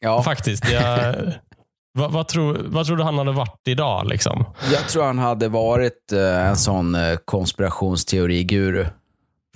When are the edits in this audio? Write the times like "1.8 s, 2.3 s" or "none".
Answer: none